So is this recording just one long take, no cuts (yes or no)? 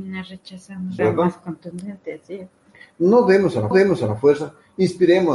no